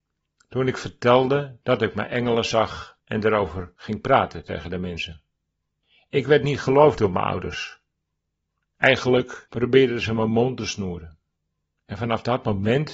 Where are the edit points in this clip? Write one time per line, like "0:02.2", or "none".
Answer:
none